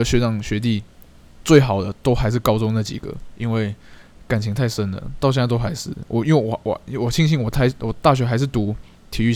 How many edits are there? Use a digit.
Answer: 0